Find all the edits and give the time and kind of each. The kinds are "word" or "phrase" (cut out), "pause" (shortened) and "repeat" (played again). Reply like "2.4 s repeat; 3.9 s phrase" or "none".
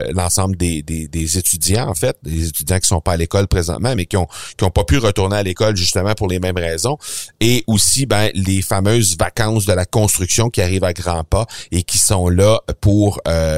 none